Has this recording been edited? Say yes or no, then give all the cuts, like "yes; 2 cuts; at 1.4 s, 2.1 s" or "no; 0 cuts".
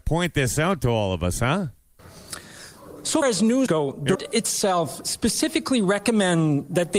yes; 3 cuts; at 3.2 s, 3.7 s, 4.2 s